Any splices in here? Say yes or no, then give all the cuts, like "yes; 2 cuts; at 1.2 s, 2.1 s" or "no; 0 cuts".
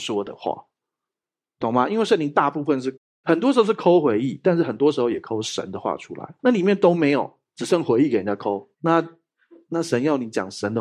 yes; 2 cuts; at 6.4 s, 8.7 s